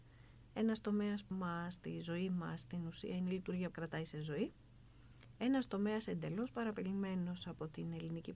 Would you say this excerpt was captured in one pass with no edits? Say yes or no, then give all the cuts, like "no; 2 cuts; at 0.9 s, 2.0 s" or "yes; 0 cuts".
no; 2 cuts; at 1.3 s, 3.7 s